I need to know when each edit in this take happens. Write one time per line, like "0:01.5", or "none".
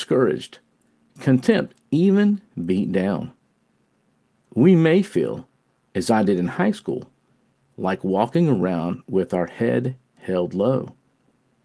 none